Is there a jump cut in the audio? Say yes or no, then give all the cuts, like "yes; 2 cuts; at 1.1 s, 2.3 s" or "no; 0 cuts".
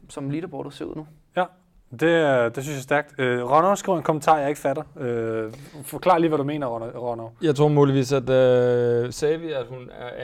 no; 0 cuts